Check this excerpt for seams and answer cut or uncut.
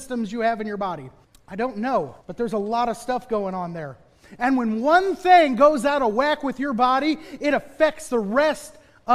cut